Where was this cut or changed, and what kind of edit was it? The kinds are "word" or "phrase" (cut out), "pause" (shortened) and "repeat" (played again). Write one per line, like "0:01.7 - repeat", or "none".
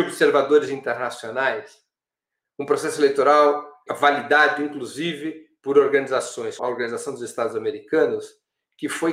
0:03.9 - word
0:06.6 - word

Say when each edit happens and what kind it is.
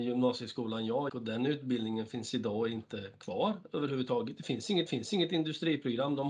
0:01.1 - word
0:04.9 - repeat

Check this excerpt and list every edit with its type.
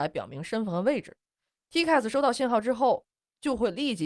none

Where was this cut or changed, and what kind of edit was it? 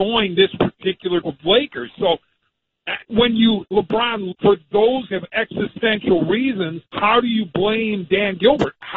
0:01.2 - word
0:03.0 - pause
0:03.7 - word
0:04.3 - word
0:05.1 - word
0:06.9 - pause

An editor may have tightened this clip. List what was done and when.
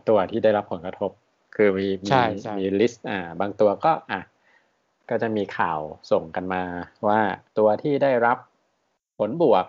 0:07.5 - pause

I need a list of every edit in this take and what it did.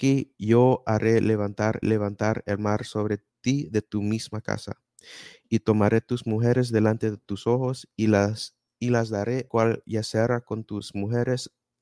0:01.8 - repeat
0:03.3 - pause
0:09.5 - phrase

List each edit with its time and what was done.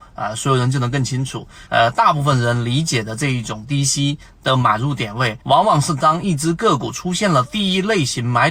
0:01.7 - pause
0:05.4 - pause

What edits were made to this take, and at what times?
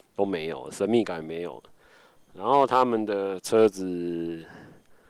none

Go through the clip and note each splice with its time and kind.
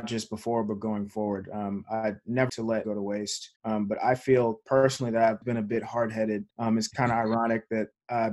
0:02.5 - word
0:02.8 - phrase
0:03.6 - pause
0:05.4 - word
0:06.5 - pause

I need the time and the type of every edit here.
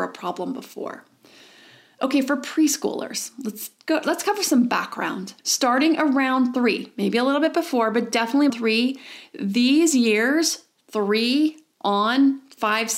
0:05.4 - pause
0:08.5 - phrase

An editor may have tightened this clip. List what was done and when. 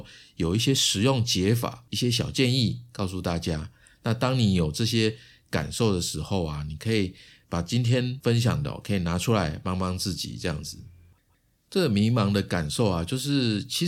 none

